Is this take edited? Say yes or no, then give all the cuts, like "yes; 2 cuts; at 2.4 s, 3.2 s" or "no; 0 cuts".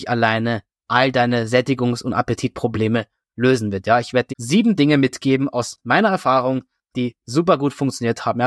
yes; 1 cut; at 4.3 s